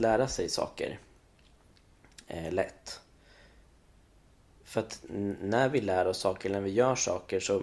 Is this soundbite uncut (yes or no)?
yes